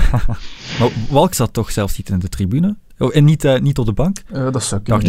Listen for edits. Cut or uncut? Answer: cut